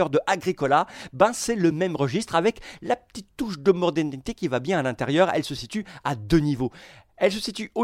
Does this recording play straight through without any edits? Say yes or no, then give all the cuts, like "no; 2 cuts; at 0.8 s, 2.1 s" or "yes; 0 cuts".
yes; 0 cuts